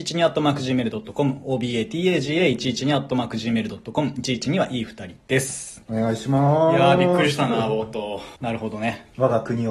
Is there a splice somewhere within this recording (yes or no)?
yes